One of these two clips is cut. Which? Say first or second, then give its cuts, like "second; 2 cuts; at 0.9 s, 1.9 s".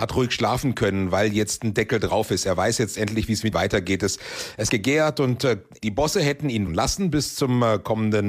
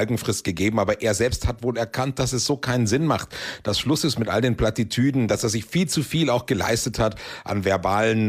first; 3 cuts; at 3.5 s, 4.7 s, 6.7 s